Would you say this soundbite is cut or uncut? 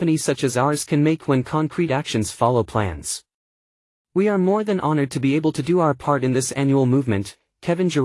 uncut